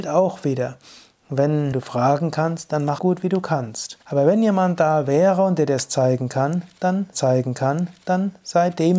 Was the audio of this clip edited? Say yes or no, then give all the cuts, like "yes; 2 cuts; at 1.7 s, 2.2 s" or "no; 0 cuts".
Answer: yes; 4 cuts; at 1.7 s, 3.0 s, 4.0 s, 7.1 s